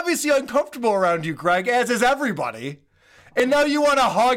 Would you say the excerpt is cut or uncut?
uncut